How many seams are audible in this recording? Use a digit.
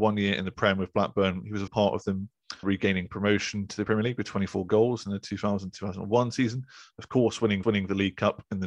3